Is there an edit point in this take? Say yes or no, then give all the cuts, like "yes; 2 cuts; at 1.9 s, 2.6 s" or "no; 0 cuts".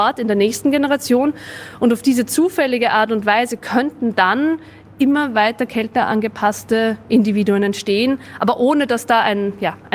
yes; 1 cut; at 5.3 s